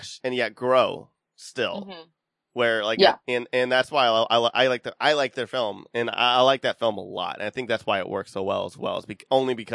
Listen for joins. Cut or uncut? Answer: uncut